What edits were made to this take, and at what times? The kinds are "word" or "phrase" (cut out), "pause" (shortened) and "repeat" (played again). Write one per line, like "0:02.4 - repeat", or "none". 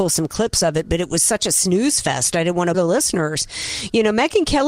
0:02.7 - word